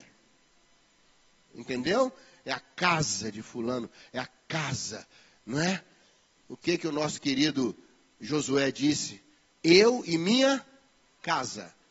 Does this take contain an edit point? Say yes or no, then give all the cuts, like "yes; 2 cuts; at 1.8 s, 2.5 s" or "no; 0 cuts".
no; 0 cuts